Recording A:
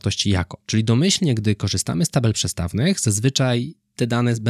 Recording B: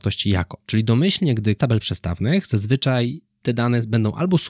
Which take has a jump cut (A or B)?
B